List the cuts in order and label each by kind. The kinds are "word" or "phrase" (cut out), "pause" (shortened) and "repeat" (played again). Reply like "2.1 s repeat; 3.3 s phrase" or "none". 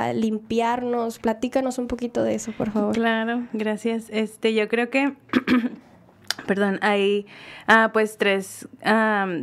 none